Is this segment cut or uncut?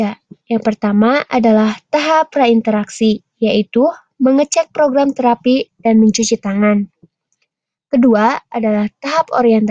uncut